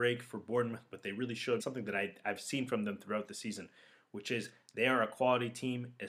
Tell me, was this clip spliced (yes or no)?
yes